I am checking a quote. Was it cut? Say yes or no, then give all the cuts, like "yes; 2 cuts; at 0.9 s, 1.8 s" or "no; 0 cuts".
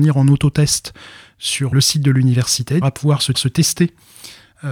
yes; 3 cuts; at 1.7 s, 2.8 s, 3.3 s